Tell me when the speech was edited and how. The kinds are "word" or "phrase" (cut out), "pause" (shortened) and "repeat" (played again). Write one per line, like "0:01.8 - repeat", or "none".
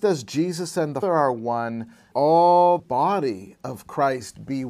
0:01.0 - word
0:02.1 - word
0:02.8 - word